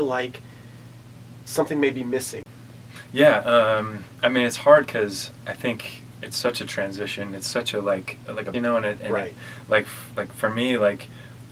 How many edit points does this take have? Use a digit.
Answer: 1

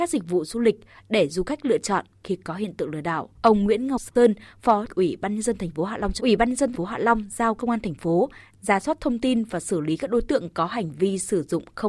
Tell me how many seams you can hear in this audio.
5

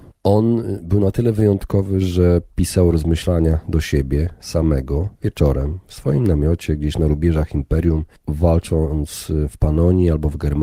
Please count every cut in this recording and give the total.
1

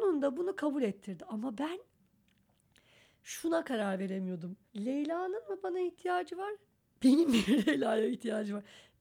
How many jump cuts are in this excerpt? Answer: 1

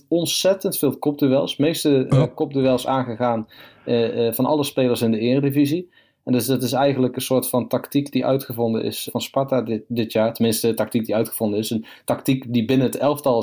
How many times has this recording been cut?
1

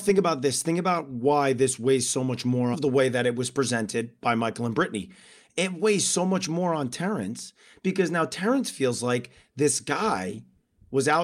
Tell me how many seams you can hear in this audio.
1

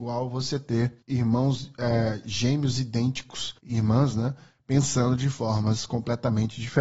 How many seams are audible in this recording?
2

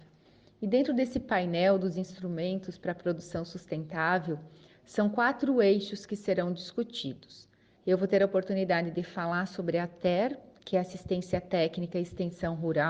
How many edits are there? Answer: 0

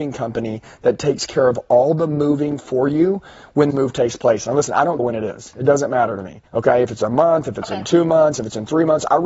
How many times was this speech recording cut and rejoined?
2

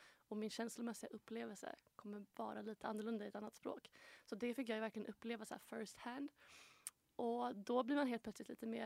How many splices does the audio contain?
0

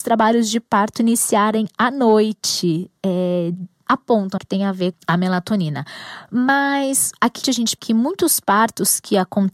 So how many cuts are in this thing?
5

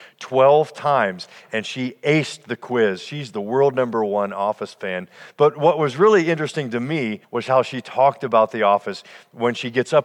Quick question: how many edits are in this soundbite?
1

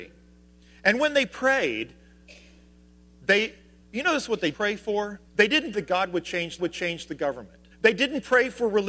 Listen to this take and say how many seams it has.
6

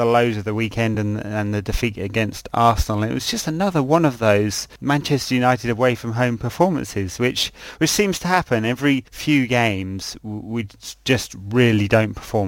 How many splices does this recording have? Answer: 0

